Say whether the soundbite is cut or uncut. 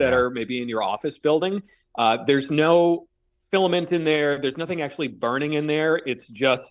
uncut